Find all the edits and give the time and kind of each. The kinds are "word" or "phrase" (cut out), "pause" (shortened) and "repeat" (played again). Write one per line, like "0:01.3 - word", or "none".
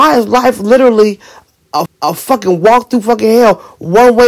0:01.9 - repeat